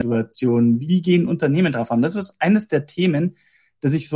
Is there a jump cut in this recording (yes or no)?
no